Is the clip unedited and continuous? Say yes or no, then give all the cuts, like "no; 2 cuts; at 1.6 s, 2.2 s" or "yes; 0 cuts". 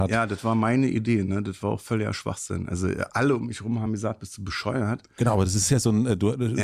yes; 0 cuts